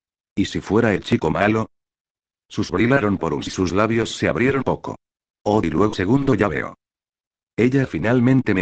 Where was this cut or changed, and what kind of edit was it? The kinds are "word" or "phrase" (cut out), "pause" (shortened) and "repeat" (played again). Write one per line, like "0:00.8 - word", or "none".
0:02.7 - word
0:03.5 - word
0:04.6 - word
0:05.6 - word
0:05.9 - word

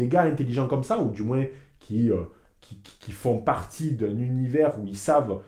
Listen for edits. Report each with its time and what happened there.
none

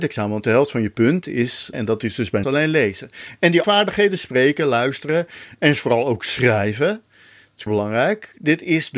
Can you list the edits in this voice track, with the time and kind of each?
0:01.7 - phrase
0:02.4 - word
0:03.6 - word
0:07.7 - word

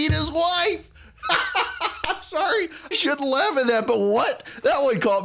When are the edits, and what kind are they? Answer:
0:02.9 - word

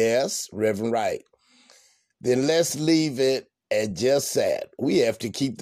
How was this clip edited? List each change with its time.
none

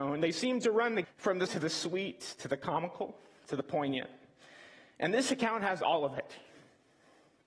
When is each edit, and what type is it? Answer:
0:01.0 - word
0:01.5 - word

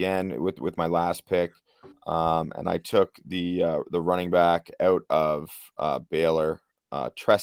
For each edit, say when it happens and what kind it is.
0:01.9 - pause

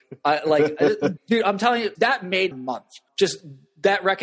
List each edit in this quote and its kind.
0:01.2 - word
0:01.9 - word
0:02.5 - word
0:03.1 - word

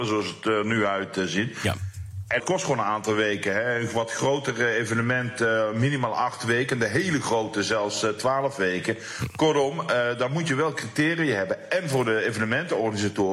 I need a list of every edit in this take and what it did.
0:02.4 - phrase

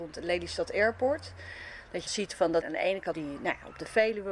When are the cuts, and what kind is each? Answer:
0:02.1 - word
0:02.6 - word
0:03.1 - word

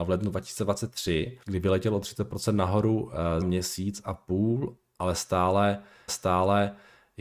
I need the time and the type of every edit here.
0:01.4 - pause
0:03.4 - word
0:06.1 - repeat

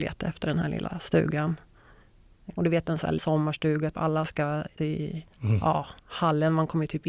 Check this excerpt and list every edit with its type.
0:02.6 - phrase
0:03.2 - word
0:03.9 - word
0:04.8 - word
0:05.3 - pause
0:06.0 - pause

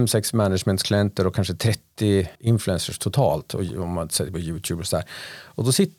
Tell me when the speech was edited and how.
0:02.4 - pause

